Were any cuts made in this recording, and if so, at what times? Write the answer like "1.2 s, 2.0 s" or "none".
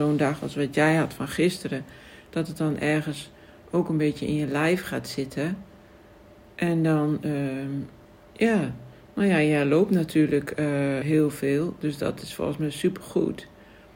11.0 s